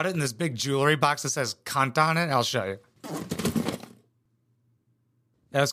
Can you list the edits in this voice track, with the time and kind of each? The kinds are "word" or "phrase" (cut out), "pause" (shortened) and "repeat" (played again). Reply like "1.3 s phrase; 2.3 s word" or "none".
none